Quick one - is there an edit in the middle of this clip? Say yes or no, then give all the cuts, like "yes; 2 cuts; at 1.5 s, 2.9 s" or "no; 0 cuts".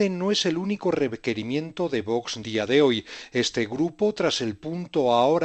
yes; 1 cut; at 2.4 s